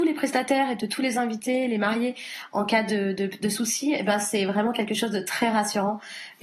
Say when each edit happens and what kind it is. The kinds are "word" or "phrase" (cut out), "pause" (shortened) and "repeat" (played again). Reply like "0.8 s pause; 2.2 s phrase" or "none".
none